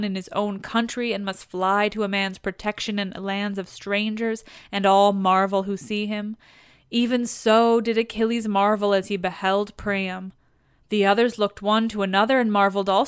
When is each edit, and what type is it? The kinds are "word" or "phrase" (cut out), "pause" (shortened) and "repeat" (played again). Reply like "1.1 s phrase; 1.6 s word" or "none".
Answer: none

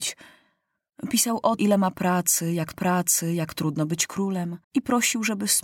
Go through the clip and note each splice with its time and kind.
1.6 s word; 2.7 s repeat; 4.6 s pause

